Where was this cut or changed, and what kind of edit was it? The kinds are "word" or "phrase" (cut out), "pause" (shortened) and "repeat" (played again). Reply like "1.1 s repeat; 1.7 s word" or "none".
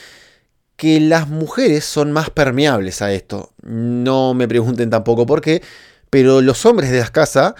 none